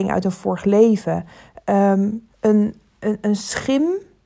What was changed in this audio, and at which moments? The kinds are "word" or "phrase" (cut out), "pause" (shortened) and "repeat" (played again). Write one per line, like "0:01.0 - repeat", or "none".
0:02.3 - pause